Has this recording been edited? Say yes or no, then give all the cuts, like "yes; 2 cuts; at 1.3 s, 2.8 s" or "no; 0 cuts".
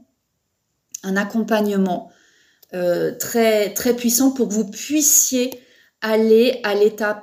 no; 0 cuts